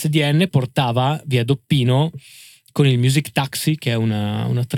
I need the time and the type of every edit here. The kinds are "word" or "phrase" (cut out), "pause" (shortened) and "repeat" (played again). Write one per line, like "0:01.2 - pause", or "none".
none

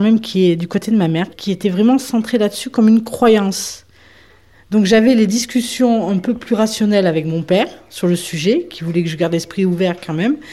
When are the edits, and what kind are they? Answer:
none

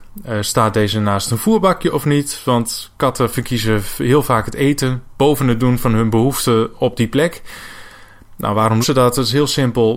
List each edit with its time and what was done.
0:08.8 - word

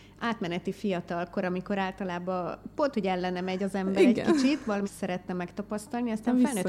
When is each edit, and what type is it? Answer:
0:04.8 - word

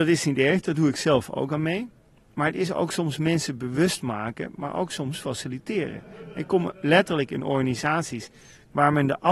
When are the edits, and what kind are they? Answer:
none

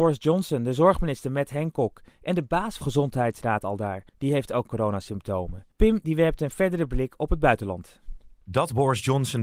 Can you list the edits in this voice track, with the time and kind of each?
0:02.8 - word
0:04.1 - pause
0:05.7 - pause

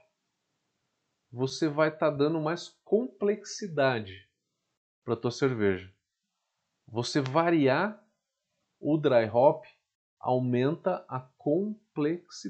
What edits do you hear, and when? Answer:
none

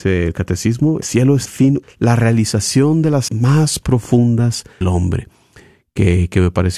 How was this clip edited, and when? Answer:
0:01.0 - word
0:01.4 - word
0:01.8 - word
0:03.3 - word
0:04.8 - word

